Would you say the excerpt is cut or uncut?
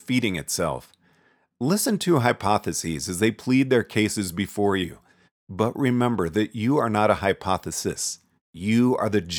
uncut